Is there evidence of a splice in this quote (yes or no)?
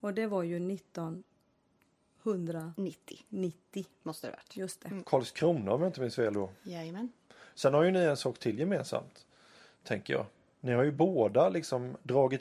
no